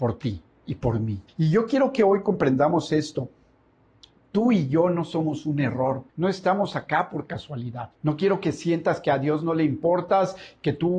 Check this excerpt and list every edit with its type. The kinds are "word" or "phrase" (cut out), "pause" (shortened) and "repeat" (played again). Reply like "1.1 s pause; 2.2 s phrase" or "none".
1.3 s pause; 6.1 s pause; 8.0 s pause